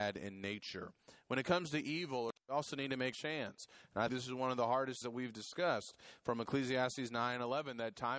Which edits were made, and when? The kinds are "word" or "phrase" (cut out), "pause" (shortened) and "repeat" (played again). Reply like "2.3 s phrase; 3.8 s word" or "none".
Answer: 2.4 s pause; 3.1 s phrase; 4.1 s word; 5.0 s word